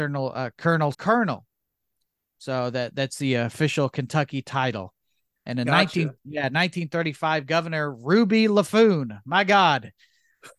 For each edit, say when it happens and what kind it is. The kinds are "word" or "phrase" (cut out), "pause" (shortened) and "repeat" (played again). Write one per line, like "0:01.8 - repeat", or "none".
0:00.9 - phrase
0:06.2 - pause